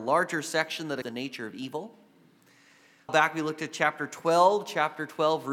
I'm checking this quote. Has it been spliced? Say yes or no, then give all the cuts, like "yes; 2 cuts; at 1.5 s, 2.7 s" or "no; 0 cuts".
yes; 2 cuts; at 1.0 s, 3.1 s